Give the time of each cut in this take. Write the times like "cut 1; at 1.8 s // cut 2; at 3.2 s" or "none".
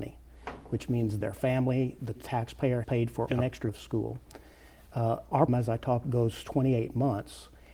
cut 1; at 1.2 s // cut 2; at 2.1 s // cut 3; at 2.8 s // cut 4; at 3.3 s // cut 5; at 3.7 s // cut 6; at 5.5 s // cut 7; at 6.0 s